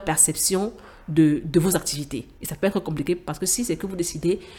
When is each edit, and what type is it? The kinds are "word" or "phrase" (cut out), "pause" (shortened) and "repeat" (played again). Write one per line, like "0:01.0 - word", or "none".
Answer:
none